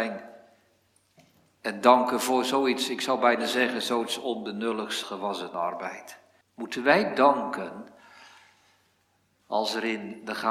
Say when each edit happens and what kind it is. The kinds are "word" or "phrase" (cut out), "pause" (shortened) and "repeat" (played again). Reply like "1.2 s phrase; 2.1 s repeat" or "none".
5.0 s word; 6.4 s pause